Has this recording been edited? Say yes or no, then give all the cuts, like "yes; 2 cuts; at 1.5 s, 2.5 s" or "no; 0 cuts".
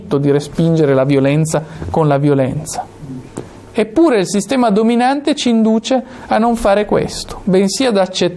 no; 0 cuts